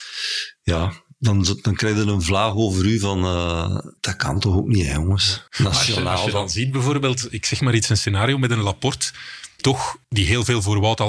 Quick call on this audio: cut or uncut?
cut